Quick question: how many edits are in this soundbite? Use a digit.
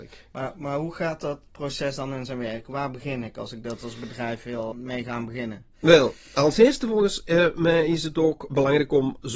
1